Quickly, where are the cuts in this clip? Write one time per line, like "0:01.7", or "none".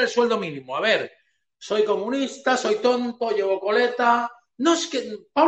none